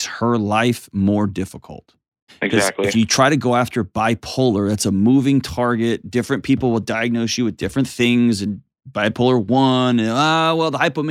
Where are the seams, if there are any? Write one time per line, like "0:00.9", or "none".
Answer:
0:02.3